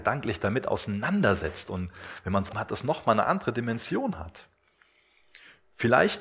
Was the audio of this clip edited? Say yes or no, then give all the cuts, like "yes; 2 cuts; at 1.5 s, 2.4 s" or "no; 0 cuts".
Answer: yes; 1 cut; at 2.5 s